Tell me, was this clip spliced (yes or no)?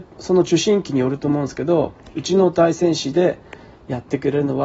no